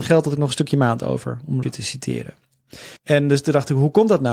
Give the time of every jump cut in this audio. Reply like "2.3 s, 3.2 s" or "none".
1.6 s, 3.0 s